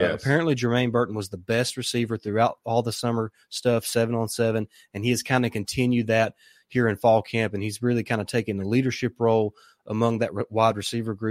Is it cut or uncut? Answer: uncut